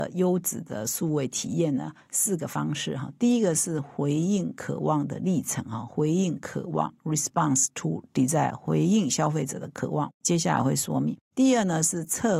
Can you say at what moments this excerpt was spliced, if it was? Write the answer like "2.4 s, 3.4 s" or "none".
none